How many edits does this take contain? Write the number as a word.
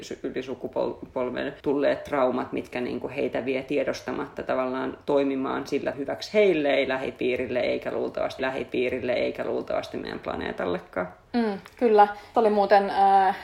four